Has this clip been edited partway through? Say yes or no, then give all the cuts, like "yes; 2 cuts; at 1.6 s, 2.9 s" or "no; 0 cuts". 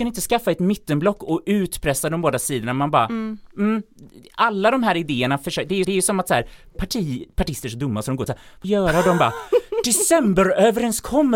yes; 4 cuts; at 5.8 s, 6.7 s, 8.3 s, 8.6 s